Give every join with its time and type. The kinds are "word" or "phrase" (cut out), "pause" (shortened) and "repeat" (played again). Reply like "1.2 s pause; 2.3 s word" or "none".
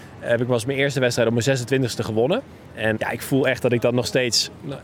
3.0 s word